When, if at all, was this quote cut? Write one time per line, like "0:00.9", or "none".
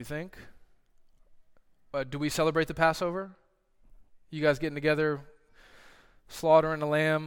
none